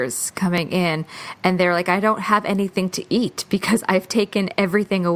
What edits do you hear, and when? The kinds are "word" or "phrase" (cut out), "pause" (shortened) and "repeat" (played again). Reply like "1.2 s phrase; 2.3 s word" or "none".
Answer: none